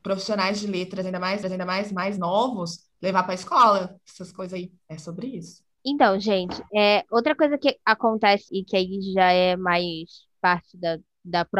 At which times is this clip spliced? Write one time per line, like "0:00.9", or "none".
0:01.4
0:04.8
0:05.7
0:08.5